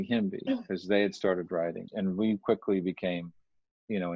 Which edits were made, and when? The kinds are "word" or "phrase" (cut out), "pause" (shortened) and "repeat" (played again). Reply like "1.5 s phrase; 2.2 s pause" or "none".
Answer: 1.9 s word